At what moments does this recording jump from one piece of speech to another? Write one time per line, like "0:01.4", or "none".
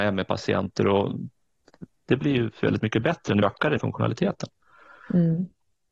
0:02.6
0:03.4
0:03.8